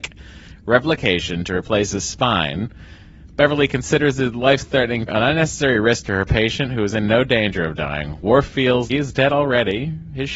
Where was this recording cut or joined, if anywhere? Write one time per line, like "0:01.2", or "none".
0:05.1
0:08.9